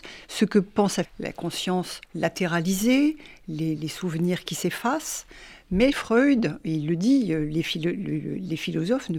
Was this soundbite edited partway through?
yes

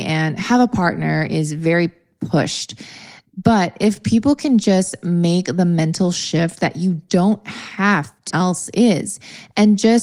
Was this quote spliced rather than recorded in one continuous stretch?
yes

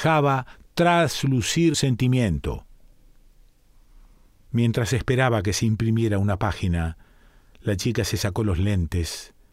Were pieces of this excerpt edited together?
yes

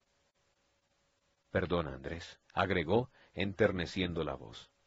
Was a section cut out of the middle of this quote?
yes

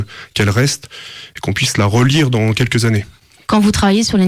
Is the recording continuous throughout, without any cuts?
yes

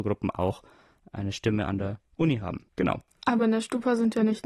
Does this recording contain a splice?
no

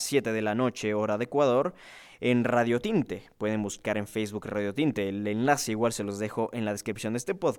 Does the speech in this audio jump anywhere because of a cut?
no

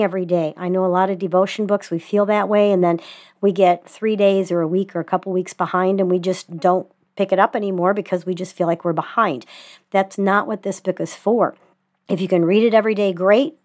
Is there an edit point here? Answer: no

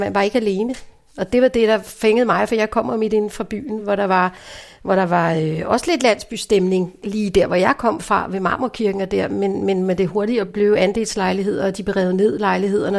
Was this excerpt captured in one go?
yes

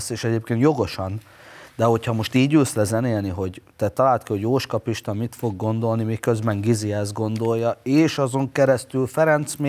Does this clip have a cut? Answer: no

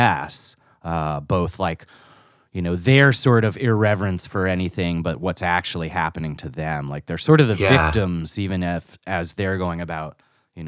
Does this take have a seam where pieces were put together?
no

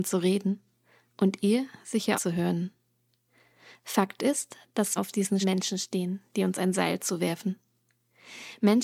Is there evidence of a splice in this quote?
yes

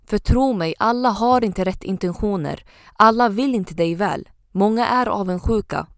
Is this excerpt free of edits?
yes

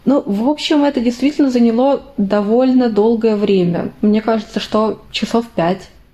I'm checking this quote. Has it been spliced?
no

